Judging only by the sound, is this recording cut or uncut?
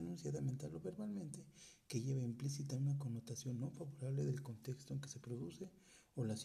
uncut